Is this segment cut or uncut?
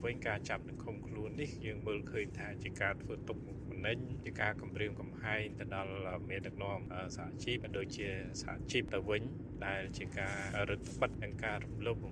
uncut